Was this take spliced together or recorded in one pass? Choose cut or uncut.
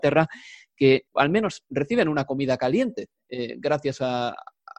cut